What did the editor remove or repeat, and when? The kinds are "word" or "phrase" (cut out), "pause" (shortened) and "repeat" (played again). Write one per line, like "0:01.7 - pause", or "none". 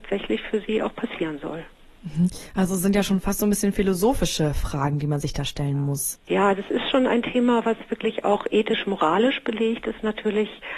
none